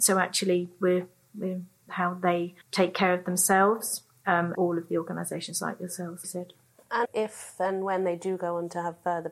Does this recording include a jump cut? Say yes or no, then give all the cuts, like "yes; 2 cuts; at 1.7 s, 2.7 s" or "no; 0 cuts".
yes; 5 cuts; at 1.9 s, 2.6 s, 4.5 s, 6.2 s, 7.0 s